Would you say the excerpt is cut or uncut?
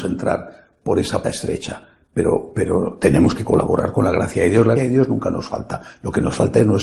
cut